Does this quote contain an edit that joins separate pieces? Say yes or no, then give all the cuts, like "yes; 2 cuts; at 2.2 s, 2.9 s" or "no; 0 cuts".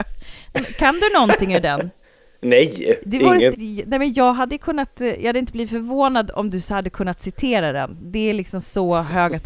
yes; 2 cuts; at 2.0 s, 3.5 s